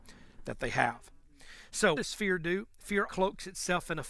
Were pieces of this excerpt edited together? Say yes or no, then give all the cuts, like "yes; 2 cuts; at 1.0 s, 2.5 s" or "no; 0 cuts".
yes; 2 cuts; at 2.0 s, 3.1 s